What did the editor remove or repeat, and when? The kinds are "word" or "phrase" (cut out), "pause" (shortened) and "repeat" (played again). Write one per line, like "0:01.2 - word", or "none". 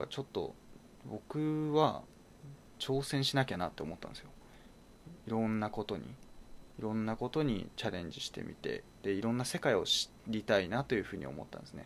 0:10.2 - pause